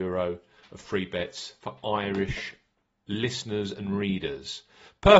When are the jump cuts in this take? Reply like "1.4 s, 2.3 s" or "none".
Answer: none